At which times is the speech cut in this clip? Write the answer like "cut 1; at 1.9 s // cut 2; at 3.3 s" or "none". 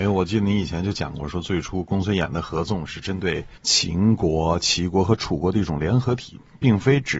cut 1; at 3.6 s